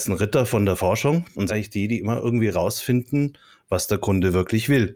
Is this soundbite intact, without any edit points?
no; 1 cut; at 1.5 s

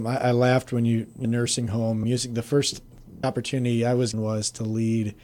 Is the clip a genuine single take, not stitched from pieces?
no; 4 cuts; at 1.2 s, 2.0 s, 3.2 s, 4.1 s

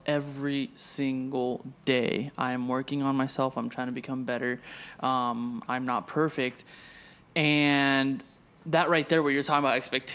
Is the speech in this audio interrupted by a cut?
no; 0 cuts

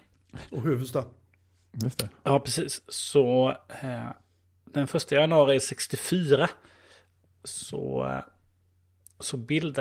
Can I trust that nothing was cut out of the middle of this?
yes; 0 cuts

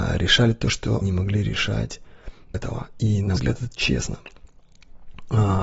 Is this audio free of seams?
no; 3 cuts; at 1.0 s, 2.5 s, 3.4 s

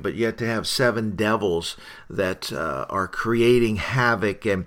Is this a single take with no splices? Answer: yes; 0 cuts

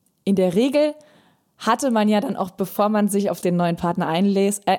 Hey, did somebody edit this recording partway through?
no; 0 cuts

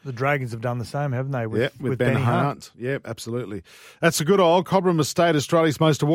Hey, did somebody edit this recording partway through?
no; 0 cuts

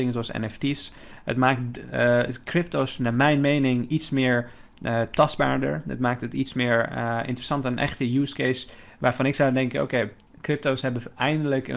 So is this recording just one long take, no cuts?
yes; 0 cuts

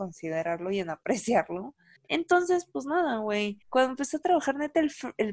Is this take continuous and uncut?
no; 2 cuts; at 2.0 s, 3.6 s

